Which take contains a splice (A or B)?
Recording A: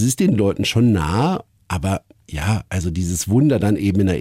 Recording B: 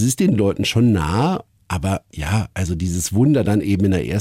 B